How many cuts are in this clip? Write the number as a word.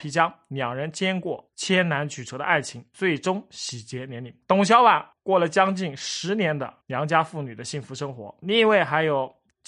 three